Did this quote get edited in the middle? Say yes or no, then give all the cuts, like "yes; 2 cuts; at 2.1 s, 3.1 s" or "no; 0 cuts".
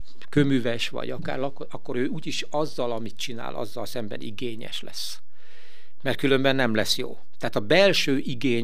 no; 0 cuts